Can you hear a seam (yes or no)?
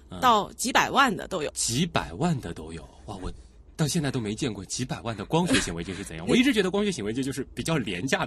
yes